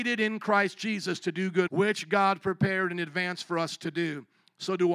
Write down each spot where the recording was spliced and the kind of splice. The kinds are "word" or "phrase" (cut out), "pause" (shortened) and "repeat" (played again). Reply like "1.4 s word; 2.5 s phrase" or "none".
1.7 s word